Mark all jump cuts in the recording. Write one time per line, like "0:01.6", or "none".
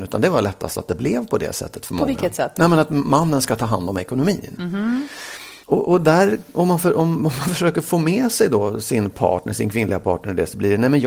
0:05.6

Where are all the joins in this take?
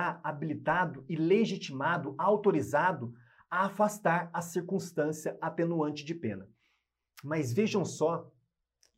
none

